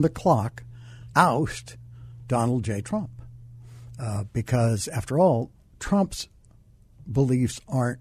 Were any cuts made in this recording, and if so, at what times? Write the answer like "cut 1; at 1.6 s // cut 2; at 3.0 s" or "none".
cut 1; at 1.1 s